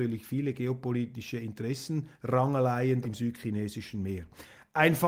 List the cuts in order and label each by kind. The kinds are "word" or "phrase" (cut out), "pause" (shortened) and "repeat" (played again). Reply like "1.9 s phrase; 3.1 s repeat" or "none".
3.0 s word